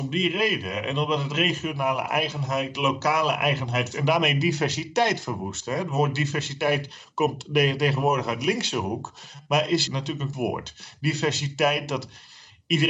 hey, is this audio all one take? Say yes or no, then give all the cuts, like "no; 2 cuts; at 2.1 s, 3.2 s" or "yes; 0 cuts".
no; 3 cuts; at 3.9 s, 9.9 s, 10.3 s